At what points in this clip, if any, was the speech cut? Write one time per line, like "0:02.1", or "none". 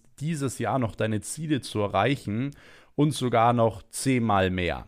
none